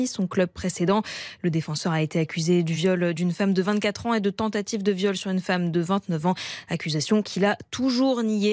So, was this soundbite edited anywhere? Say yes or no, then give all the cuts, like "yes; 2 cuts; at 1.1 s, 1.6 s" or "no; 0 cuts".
no; 0 cuts